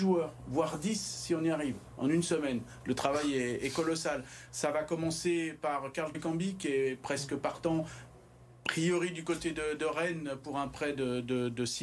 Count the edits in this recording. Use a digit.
1